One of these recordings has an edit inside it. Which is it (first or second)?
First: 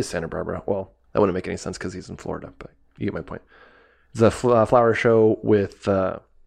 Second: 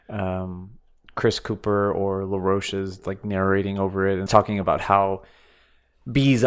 second